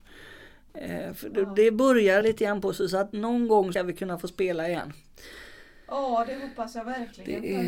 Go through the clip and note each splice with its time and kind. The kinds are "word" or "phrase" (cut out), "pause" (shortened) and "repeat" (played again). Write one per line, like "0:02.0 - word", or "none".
0:02.2 - word
0:03.7 - word